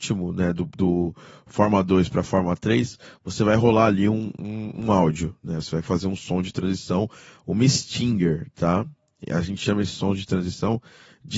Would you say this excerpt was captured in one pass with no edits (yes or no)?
yes